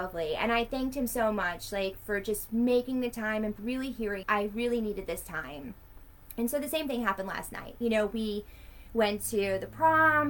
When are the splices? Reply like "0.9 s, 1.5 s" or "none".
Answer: 3.6 s, 4.2 s